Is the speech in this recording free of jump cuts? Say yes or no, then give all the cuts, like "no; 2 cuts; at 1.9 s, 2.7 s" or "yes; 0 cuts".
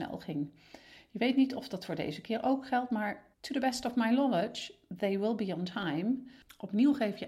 no; 1 cut; at 3.3 s